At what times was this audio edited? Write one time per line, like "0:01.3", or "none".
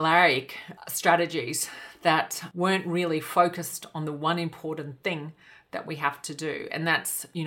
none